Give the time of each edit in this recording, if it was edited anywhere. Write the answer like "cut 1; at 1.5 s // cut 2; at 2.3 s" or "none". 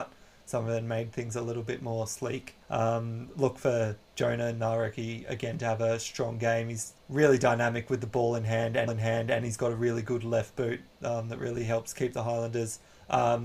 cut 1; at 2.6 s // cut 2; at 4.0 s // cut 3; at 7.0 s // cut 4; at 8.9 s